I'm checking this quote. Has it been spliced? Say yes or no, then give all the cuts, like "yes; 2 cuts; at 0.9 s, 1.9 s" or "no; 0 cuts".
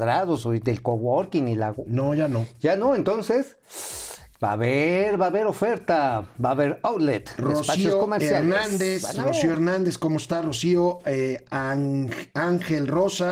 no; 0 cuts